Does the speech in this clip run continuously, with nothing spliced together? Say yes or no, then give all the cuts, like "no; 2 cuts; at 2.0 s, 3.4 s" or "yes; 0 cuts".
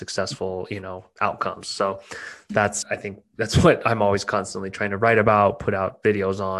no; 1 cut; at 2.8 s